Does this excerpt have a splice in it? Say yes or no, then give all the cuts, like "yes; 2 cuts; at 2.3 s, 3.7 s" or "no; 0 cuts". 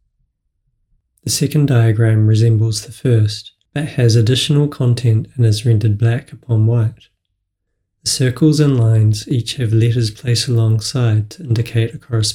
no; 0 cuts